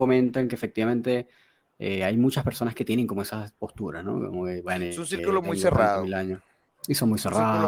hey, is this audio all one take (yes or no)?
yes